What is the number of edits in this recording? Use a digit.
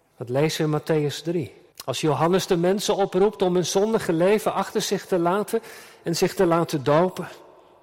1